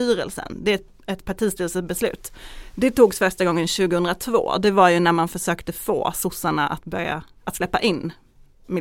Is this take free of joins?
yes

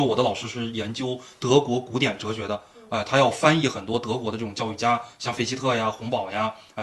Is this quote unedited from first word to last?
yes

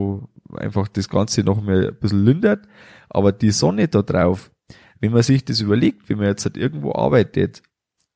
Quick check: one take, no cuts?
yes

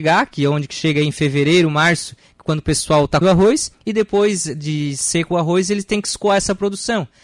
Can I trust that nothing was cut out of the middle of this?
no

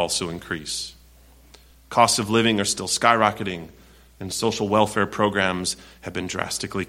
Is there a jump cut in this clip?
no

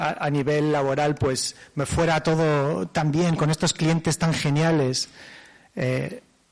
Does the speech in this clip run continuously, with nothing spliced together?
yes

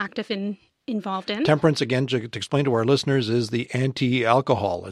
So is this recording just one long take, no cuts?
yes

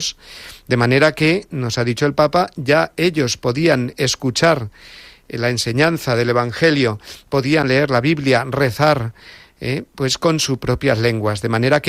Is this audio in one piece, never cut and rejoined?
yes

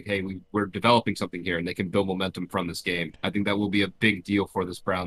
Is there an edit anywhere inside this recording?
yes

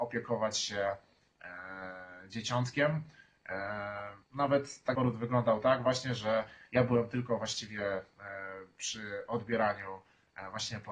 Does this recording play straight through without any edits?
no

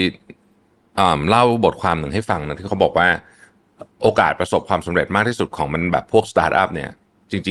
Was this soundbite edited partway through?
yes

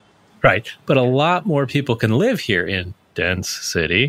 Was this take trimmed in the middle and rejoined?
no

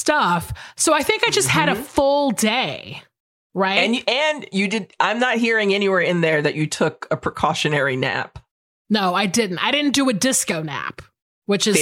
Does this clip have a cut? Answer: no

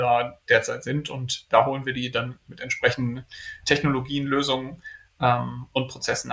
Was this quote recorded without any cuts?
yes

